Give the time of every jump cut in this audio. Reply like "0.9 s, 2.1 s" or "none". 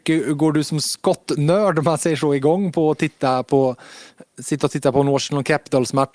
none